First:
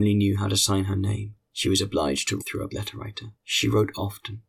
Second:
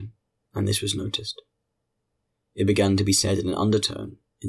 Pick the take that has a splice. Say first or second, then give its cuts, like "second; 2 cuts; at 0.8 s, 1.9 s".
first; 4 cuts; at 1.5 s, 2.4 s, 2.7 s, 3.3 s